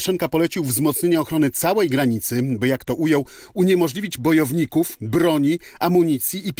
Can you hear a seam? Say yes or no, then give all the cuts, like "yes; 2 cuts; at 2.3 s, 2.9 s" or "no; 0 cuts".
yes; 1 cut; at 4.2 s